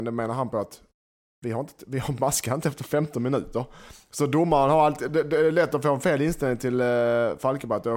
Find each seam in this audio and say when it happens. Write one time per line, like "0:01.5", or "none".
none